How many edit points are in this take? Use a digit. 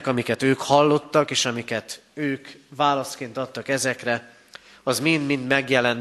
0